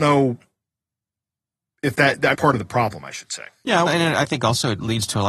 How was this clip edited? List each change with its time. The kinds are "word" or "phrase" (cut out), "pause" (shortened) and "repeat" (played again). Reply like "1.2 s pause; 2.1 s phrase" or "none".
2.3 s phrase; 3.9 s word